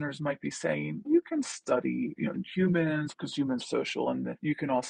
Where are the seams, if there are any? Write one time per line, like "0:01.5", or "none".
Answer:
0:01.0
0:01.4
0:02.3
0:03.6